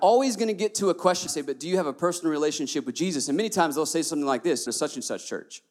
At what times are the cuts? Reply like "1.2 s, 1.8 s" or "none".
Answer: 1.3 s, 4.7 s